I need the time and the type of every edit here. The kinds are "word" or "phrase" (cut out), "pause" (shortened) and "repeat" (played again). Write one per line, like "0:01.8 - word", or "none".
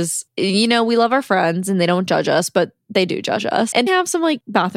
0:03.9 - word